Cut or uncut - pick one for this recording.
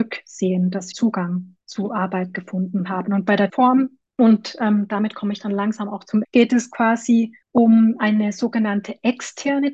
cut